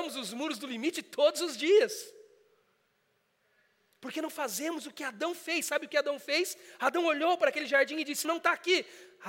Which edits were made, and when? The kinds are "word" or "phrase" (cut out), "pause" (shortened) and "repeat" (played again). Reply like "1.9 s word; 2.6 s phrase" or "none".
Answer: 8.2 s word